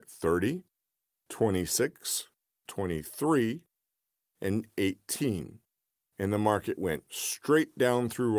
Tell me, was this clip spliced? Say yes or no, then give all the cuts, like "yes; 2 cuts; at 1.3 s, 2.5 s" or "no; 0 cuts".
no; 0 cuts